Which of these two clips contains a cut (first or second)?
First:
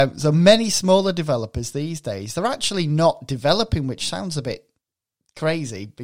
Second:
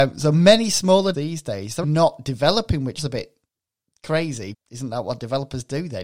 second